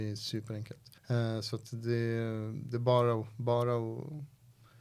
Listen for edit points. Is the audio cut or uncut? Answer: cut